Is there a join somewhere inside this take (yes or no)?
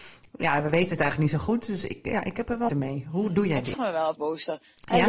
yes